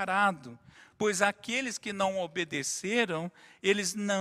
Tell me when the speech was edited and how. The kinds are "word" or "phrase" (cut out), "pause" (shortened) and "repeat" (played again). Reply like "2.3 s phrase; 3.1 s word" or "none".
none